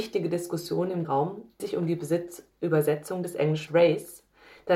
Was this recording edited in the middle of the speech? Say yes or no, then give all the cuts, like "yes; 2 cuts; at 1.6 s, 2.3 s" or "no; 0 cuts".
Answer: yes; 3 cuts; at 1.0 s, 1.6 s, 3.7 s